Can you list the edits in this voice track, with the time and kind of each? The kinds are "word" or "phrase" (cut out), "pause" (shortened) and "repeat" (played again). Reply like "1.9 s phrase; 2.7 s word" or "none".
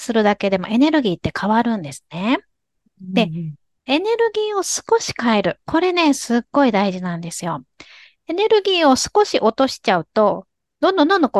none